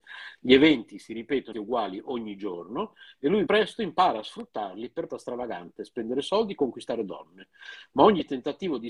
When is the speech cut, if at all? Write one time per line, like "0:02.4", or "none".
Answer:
0:01.5
0:03.5
0:05.1

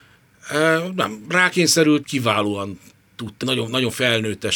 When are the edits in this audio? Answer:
0:02.0
0:03.4

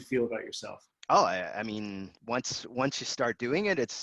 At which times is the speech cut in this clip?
0:00.9

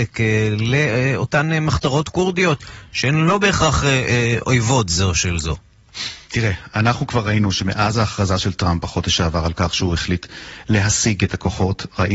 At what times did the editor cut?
0:06.3

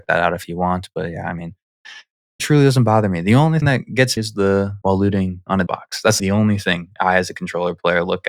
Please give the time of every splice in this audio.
0:02.4
0:03.6
0:04.2
0:04.8
0:05.7
0:06.2

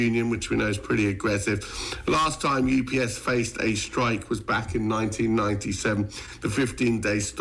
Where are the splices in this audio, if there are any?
none

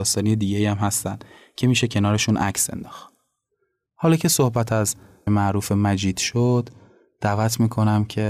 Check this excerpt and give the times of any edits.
0:05.3

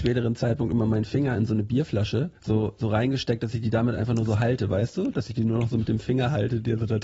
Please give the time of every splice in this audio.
0:02.4

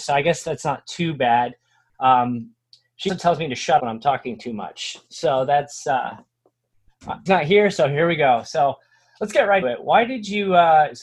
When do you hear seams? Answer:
0:03.1
0:03.8
0:07.3
0:09.6

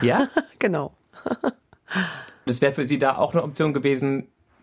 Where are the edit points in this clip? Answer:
0:02.5

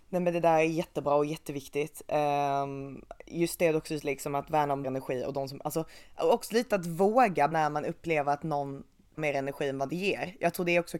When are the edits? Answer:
0:04.8
0:07.5
0:09.2

